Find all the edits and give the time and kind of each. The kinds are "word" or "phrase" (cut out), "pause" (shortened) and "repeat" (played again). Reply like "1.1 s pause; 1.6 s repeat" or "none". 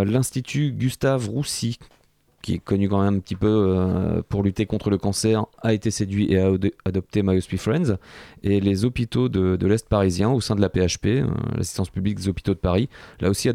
none